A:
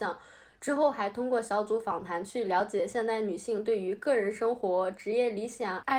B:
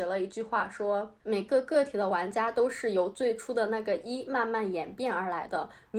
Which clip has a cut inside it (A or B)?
B